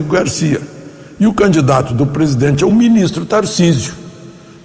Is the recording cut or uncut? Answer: uncut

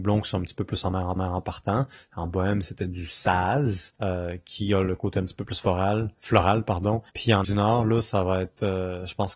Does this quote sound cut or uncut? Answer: cut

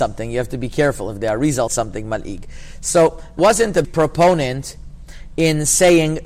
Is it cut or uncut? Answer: cut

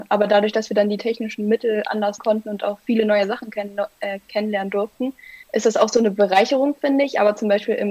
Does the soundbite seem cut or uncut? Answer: cut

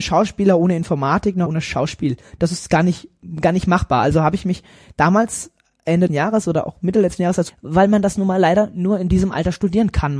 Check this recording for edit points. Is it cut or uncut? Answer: cut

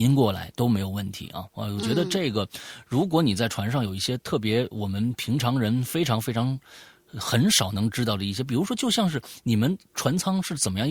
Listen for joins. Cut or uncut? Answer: uncut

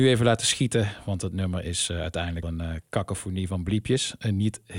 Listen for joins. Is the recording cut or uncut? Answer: cut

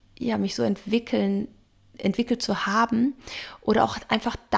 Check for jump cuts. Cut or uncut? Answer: uncut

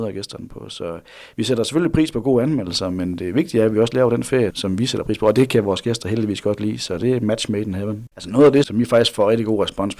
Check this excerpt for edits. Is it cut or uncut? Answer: cut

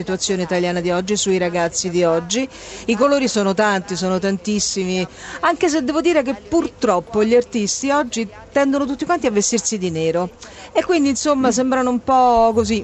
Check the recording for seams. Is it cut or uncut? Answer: uncut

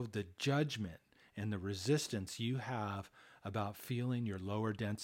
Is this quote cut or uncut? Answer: uncut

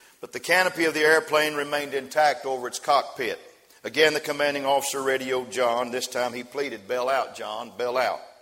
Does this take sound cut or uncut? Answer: uncut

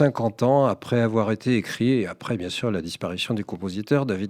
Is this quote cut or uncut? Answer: uncut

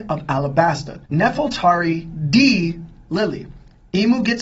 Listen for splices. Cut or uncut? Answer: cut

